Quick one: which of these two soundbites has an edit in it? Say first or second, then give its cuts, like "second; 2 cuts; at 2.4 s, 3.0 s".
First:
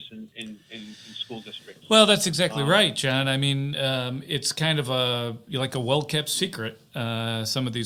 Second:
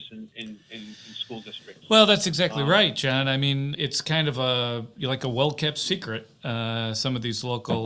second; 1 cut; at 3.7 s